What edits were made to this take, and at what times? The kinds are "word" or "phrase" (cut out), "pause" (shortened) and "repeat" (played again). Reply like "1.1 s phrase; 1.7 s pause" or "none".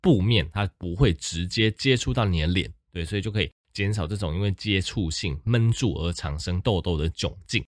none